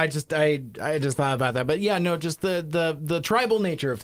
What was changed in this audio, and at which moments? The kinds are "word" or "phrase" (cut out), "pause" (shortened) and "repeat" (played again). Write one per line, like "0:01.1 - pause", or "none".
none

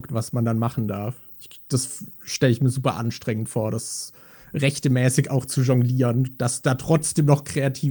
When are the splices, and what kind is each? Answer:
none

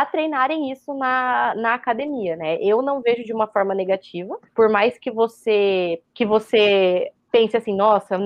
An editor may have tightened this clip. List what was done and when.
0:04.5 - pause
0:06.1 - pause

